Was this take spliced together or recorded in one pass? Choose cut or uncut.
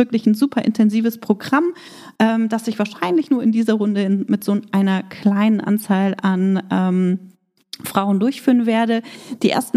uncut